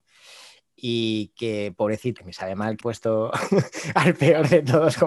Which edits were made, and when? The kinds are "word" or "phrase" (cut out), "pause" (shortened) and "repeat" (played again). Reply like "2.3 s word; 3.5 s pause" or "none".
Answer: 2.2 s phrase; 2.8 s word